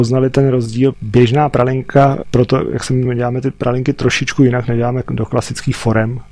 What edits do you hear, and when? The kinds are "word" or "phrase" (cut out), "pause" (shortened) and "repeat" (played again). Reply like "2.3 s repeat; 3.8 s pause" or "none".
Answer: 0.9 s phrase; 2.2 s word; 3.1 s word